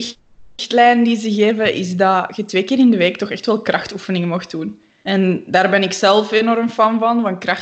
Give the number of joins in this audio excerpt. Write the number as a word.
zero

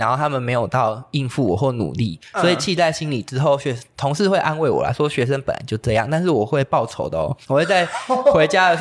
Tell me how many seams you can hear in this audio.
one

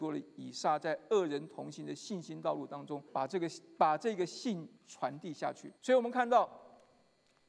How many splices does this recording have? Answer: three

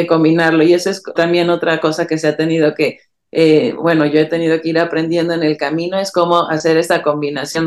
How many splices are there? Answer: one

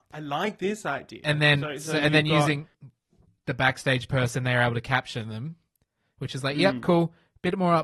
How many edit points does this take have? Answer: zero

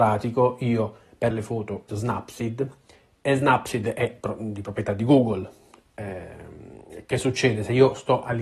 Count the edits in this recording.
two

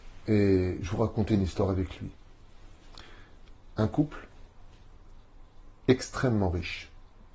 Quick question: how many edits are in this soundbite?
zero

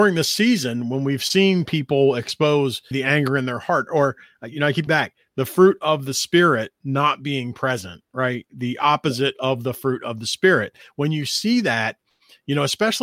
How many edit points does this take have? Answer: two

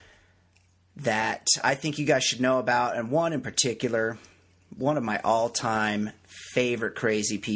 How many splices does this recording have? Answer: zero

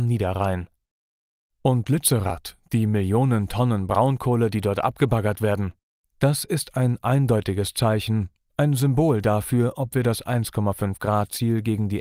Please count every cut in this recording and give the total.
zero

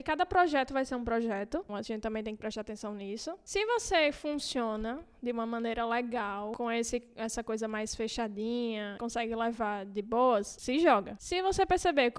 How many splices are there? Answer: two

